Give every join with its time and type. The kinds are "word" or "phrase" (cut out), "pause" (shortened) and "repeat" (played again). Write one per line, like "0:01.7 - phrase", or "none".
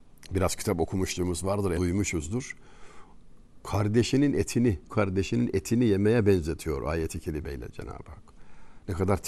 0:01.7 - word
0:04.9 - word

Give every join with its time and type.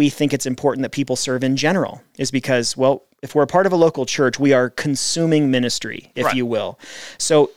none

